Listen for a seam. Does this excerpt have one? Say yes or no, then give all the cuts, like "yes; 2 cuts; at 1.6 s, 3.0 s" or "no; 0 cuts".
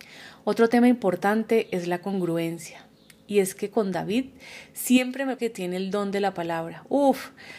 yes; 1 cut; at 5.4 s